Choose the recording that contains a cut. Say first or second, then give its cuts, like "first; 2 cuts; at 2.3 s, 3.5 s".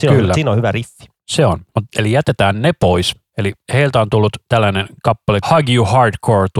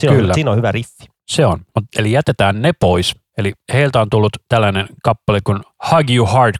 first; 1 cut; at 5.4 s